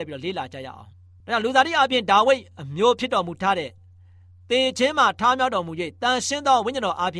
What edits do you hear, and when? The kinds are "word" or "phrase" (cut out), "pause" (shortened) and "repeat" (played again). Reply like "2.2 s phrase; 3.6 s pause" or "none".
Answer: none